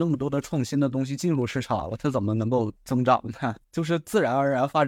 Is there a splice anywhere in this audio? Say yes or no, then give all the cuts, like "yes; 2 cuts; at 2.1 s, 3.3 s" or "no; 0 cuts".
yes; 2 cuts; at 2.8 s, 3.6 s